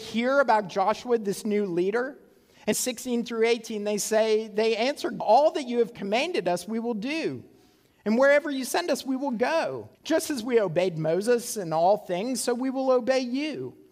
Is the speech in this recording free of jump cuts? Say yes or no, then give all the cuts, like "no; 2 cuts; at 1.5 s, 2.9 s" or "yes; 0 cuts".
no; 3 cuts; at 2.7 s, 5.2 s, 9.9 s